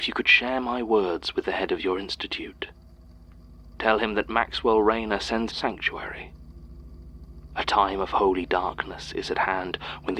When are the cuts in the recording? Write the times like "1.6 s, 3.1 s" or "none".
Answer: 5.5 s